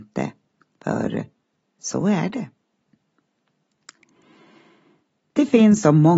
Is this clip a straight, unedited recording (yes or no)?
yes